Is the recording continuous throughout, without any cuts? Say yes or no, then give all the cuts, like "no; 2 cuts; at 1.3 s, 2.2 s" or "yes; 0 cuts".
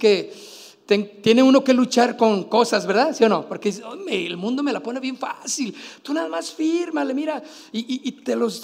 yes; 0 cuts